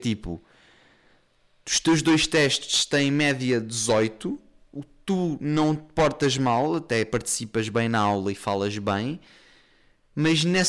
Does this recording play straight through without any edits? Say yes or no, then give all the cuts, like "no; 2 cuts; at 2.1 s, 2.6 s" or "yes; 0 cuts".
yes; 0 cuts